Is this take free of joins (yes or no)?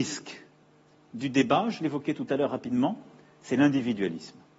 yes